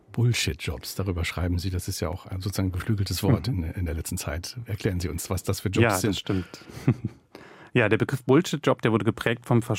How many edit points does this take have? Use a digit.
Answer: 0